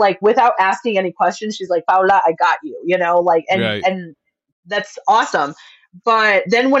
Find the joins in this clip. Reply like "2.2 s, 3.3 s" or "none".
none